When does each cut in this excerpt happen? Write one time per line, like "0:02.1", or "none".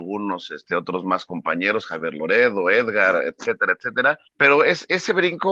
0:04.3